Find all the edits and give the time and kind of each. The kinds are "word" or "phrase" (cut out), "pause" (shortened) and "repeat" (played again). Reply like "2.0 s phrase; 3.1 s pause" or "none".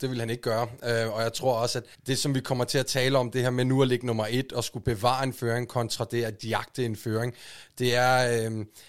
1.9 s pause